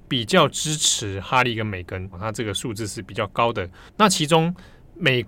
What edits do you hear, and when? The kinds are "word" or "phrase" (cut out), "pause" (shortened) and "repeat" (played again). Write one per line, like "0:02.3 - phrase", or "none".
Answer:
0:02.1 - word
0:03.9 - pause

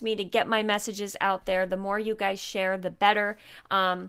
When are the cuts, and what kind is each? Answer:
none

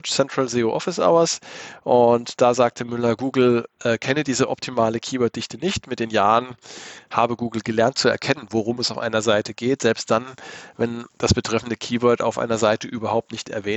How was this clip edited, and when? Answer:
0:11.1 - pause

